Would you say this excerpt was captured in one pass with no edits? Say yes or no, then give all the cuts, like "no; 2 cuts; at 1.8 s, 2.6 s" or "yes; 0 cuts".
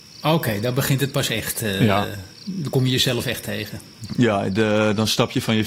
yes; 0 cuts